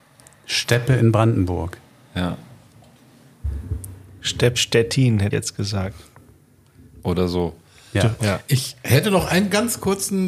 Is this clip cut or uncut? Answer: cut